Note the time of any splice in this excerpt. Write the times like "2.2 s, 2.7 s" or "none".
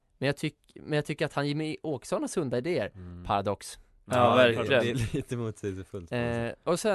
none